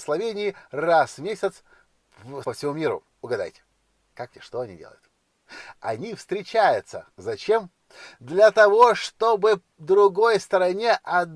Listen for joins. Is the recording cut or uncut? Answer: cut